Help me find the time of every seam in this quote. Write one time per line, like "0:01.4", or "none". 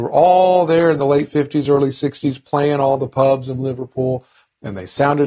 none